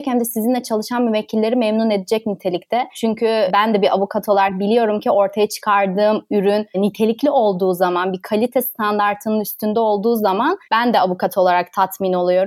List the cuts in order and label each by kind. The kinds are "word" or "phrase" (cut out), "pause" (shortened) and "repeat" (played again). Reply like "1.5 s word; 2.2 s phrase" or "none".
none